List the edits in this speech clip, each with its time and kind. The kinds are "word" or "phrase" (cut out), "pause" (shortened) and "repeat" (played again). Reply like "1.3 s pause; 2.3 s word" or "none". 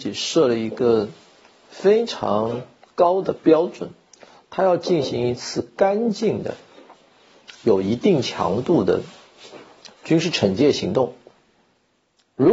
none